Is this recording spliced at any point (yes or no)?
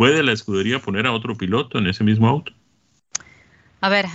no